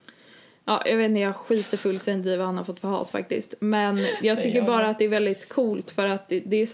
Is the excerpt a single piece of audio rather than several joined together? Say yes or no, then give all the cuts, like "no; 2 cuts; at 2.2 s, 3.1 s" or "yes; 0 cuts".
yes; 0 cuts